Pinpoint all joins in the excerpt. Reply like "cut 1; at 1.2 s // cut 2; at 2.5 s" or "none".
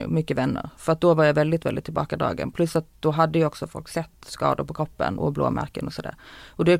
cut 1; at 5.2 s